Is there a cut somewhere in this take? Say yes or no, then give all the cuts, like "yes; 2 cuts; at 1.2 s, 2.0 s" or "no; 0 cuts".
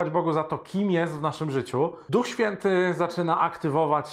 no; 0 cuts